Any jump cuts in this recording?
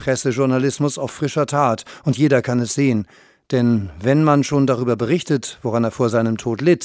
no; 0 cuts

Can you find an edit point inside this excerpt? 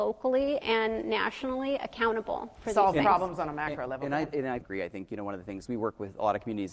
yes; 1 cut; at 4.6 s

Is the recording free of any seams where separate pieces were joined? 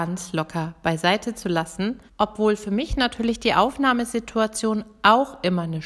no; 1 cut; at 2.1 s

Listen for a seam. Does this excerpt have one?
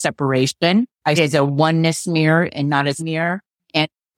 yes; 2 cuts; at 1.2 s, 3.0 s

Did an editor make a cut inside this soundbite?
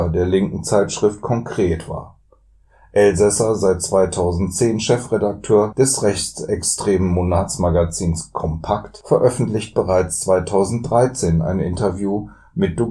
no; 0 cuts

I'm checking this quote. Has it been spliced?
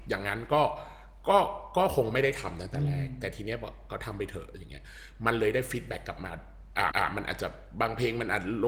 yes; 1 cut; at 6.9 s

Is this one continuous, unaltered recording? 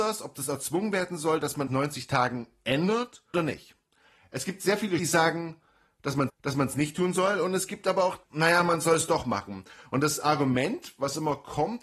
no; 5 cuts; at 1.7 s, 3.3 s, 5.0 s, 6.3 s, 8.2 s

